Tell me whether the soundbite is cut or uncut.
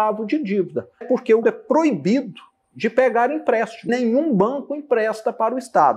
cut